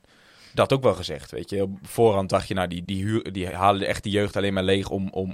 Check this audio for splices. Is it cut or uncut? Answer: cut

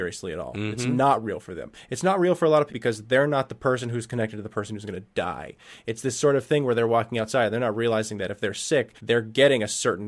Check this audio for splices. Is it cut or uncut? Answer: cut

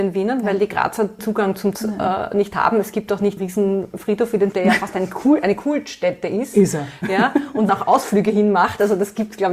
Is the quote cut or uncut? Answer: cut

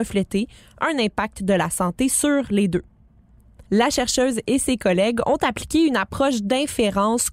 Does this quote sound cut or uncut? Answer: cut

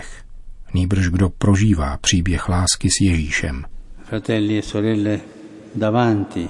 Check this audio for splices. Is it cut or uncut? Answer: uncut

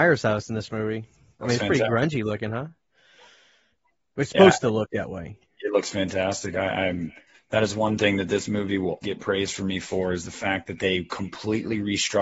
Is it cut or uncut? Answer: cut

